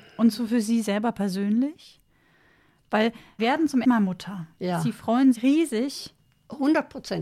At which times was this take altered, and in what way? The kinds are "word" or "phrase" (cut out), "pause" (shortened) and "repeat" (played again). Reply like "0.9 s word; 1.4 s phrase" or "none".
3.4 s word; 3.8 s word; 5.3 s word